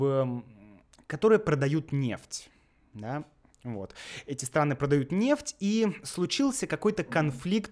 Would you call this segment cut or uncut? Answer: uncut